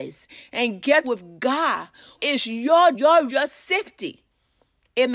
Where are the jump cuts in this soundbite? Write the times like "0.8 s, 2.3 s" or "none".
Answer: 1.0 s, 2.2 s, 2.9 s, 3.3 s